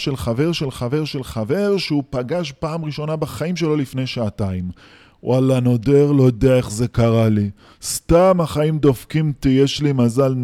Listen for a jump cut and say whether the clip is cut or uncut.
uncut